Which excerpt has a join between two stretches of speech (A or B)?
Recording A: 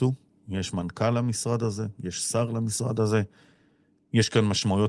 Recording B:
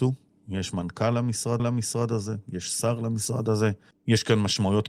B